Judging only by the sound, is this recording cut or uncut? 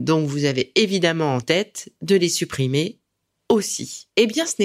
uncut